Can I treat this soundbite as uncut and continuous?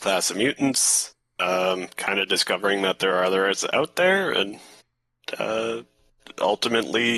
yes; 0 cuts

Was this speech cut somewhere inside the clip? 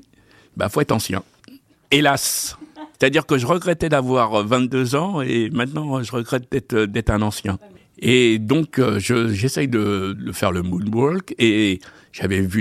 no; 0 cuts

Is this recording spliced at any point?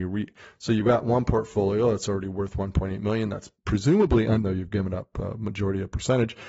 yes; 2 cuts; at 3.6 s, 4.4 s

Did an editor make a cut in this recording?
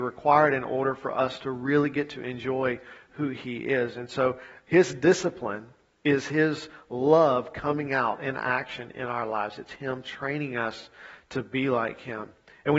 no; 0 cuts

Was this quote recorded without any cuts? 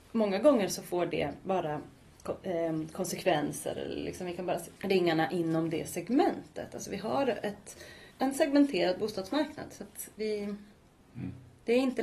no; 2 cuts; at 4.8 s, 8.1 s

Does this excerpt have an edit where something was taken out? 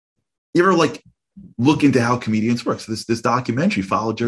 yes; 1 cut; at 1.5 s

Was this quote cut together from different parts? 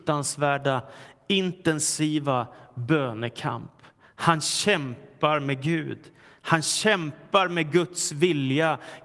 no; 0 cuts

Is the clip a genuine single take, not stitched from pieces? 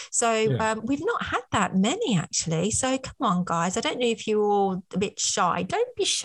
yes; 0 cuts

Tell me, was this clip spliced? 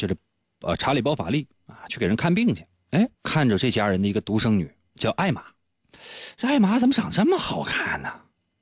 yes; 1 cut; at 3.1 s

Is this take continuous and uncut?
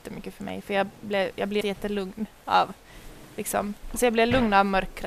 no; 1 cut; at 1.6 s

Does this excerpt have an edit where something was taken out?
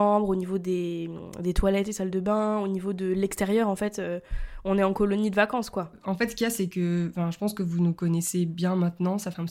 no; 0 cuts

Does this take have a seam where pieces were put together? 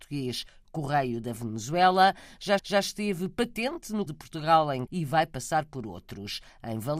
yes; 3 cuts; at 2.6 s, 4.1 s, 4.9 s

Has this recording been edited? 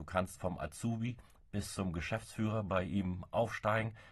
no; 0 cuts

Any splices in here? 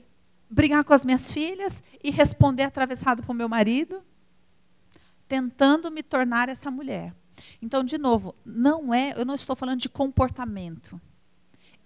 no; 0 cuts

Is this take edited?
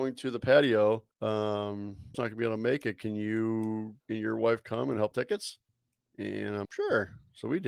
yes; 6 cuts; at 1.1 s, 2.1 s, 4.0 s, 5.1 s, 5.7 s, 6.6 s

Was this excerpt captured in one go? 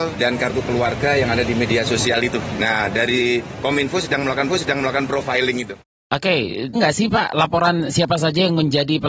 no; 2 cuts; at 4.5 s, 6.7 s

